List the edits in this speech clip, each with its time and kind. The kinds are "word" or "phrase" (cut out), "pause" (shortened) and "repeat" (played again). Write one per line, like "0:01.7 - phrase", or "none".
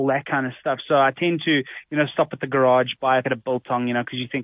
0:03.2 - word